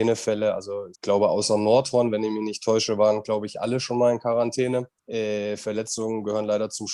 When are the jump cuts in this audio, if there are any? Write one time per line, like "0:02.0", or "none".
0:00.9
0:05.0